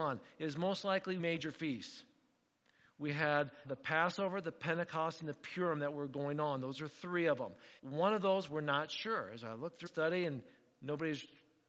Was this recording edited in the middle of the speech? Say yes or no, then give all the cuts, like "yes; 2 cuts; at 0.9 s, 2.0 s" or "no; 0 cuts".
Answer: yes; 4 cuts; at 1.2 s, 3.6 s, 7.8 s, 9.9 s